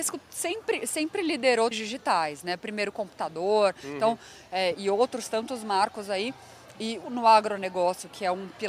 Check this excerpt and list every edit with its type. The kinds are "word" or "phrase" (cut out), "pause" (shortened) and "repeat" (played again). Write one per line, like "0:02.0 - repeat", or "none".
0:01.7 - word
0:04.7 - word
0:07.0 - phrase